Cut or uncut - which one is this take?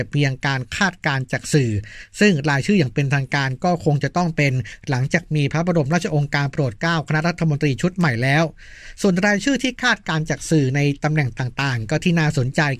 uncut